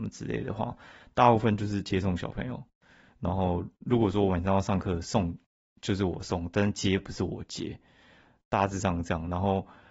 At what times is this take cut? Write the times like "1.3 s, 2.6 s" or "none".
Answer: none